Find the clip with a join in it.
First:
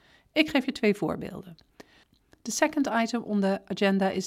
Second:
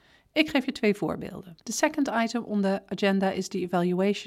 second; 1 cut; at 1.6 s

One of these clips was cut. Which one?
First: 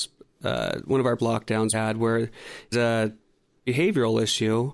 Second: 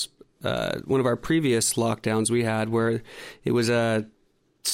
first; 4 cuts; at 1.2 s, 1.7 s, 2.7 s, 3.6 s

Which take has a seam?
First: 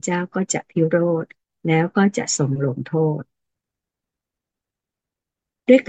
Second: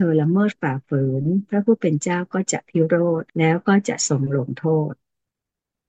second; 1 cut; at 3.3 s

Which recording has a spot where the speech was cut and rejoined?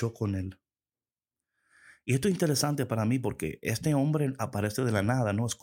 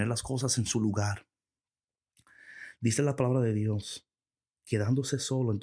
second; 1 cut; at 4.3 s

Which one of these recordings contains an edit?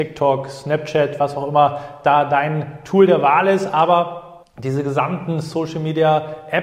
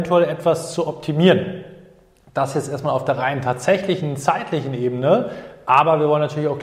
first; 1 cut; at 4.4 s

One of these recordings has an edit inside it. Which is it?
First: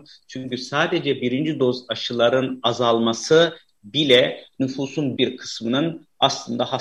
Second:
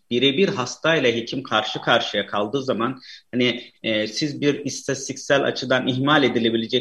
first; 1 cut; at 5.2 s

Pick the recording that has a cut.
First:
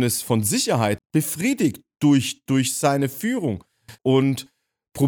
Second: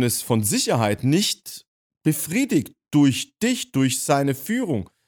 first; 3 cuts; at 1.0 s, 2.5 s, 4.0 s

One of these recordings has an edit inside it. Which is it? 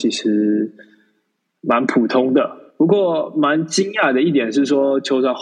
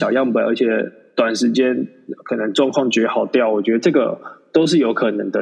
first; 1 cut; at 2.7 s

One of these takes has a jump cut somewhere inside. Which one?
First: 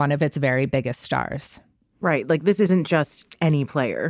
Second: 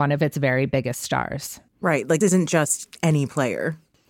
second; 2 cuts; at 1.7 s, 2.2 s

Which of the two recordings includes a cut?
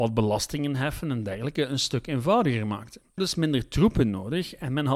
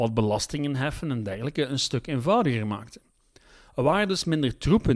first; 1 cut; at 3.2 s

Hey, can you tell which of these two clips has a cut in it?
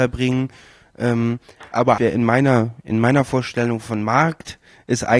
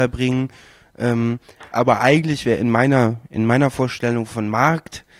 first; 1 cut; at 2.0 s

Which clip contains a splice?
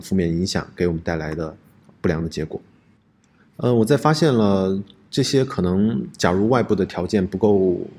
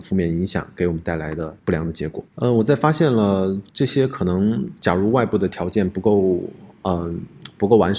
second; 3 cuts; at 1.6 s, 2.3 s, 3.7 s

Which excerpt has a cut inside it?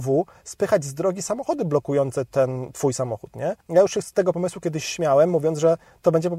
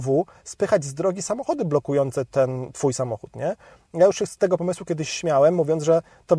first; 1 cut; at 3.6 s

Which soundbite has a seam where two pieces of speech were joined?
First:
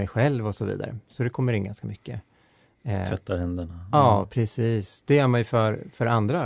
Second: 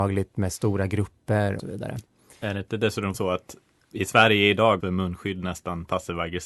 second; 4 cuts; at 1.6 s, 3.1 s, 3.9 s, 4.8 s

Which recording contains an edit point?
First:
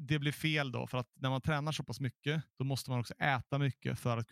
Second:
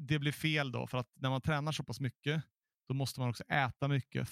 first; 1 cut; at 2.5 s

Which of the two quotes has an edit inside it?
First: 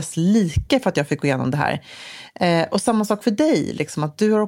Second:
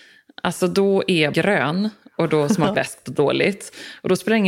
second; 2 cuts; at 1.3 s, 2.7 s

